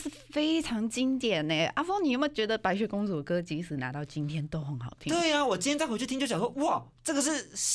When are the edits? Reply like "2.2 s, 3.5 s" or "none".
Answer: none